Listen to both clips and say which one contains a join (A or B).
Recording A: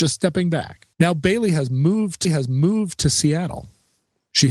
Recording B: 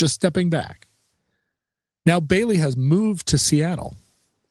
A